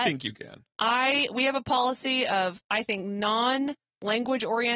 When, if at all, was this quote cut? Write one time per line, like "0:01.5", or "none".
none